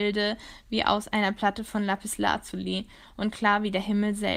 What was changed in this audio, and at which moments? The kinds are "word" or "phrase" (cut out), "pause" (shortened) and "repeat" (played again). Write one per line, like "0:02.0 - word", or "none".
none